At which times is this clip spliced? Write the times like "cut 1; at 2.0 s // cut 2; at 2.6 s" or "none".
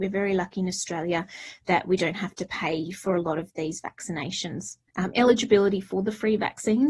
cut 1; at 4.9 s